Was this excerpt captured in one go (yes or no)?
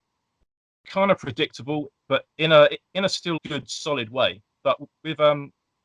no